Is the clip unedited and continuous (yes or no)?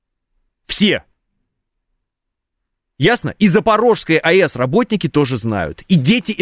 yes